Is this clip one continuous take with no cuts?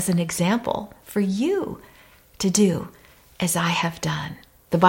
yes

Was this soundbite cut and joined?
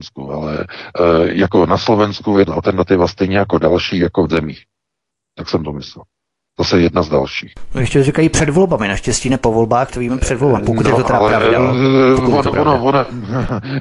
yes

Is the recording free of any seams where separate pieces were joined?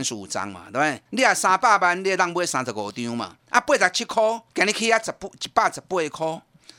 no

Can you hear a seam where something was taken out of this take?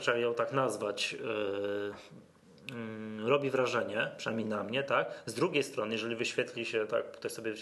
no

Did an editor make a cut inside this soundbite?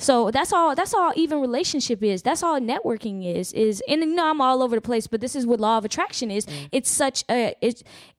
no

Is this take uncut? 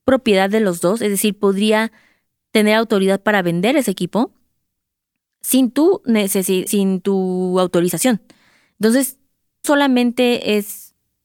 no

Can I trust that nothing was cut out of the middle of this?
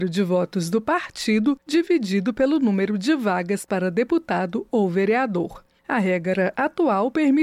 no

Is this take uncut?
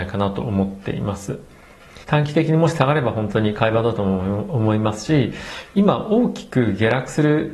no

